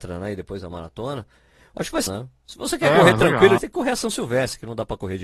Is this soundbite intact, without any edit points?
no; 2 cuts; at 2.1 s, 3.6 s

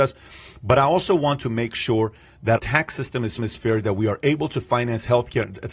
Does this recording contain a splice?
yes; 2 cuts; at 2.6 s, 3.4 s

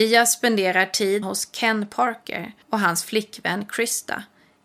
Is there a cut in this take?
yes; 2 cuts; at 1.2 s, 2.6 s

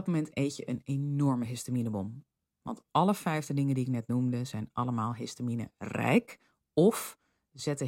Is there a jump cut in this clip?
no; 0 cuts

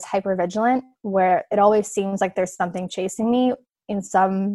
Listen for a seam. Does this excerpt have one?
no; 0 cuts

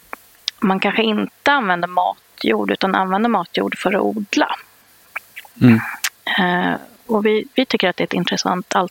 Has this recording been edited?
yes; 1 cut; at 7.5 s

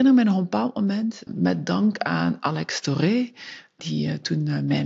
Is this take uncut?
no; 2 cuts; at 1.3 s, 3.8 s

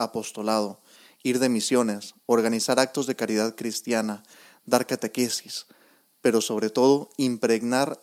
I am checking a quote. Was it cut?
no; 0 cuts

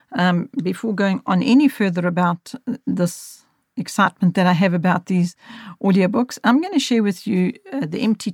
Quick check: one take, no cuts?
yes; 0 cuts

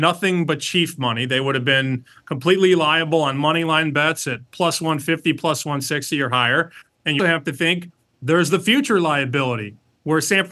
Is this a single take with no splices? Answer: no; 1 cut; at 7.2 s

